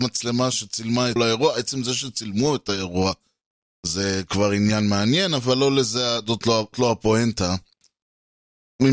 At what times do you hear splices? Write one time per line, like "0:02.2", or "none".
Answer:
0:01.2
0:06.7